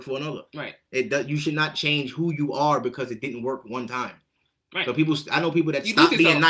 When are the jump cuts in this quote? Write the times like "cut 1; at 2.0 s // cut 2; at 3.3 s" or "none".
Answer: none